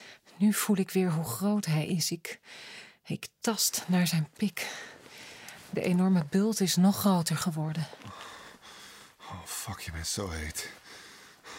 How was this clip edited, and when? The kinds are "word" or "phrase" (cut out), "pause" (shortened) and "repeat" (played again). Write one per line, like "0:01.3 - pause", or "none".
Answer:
none